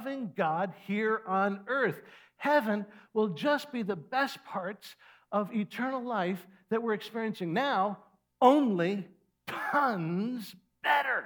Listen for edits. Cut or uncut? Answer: uncut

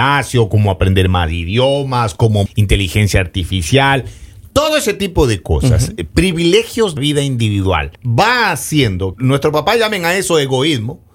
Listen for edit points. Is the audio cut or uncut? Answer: cut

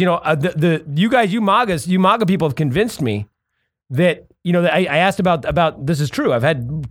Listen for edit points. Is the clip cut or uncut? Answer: uncut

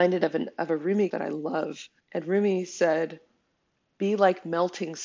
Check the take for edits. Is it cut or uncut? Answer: cut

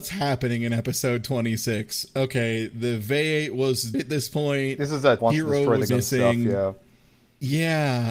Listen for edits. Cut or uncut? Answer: cut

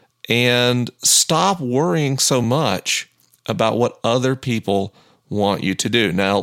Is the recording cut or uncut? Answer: uncut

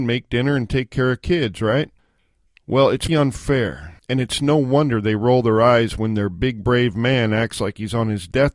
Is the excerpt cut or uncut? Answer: cut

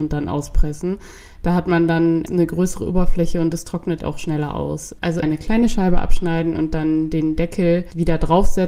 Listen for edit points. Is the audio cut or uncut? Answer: cut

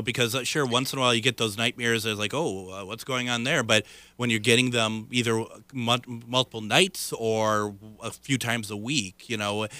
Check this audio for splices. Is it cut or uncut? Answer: uncut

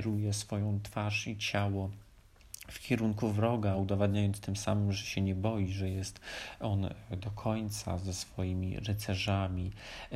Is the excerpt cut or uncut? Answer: uncut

